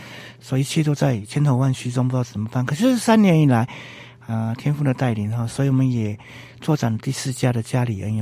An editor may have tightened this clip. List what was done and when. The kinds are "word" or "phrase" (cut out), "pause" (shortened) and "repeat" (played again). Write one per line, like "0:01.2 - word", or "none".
none